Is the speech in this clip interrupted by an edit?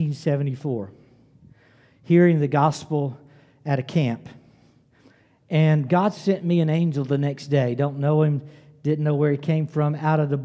no; 0 cuts

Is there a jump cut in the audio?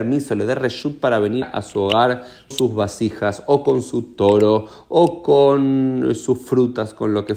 yes; 2 cuts; at 1.4 s, 2.5 s

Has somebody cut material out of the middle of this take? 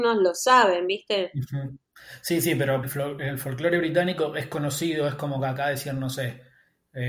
yes; 1 cut; at 2.8 s

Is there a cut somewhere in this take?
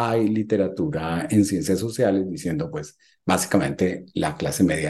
no; 0 cuts

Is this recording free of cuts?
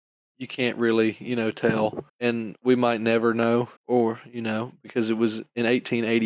no; 2 cuts; at 2.1 s, 3.8 s

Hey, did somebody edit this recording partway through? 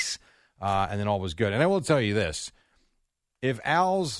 no; 0 cuts

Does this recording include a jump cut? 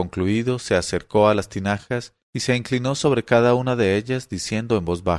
yes; 1 cut; at 2.2 s

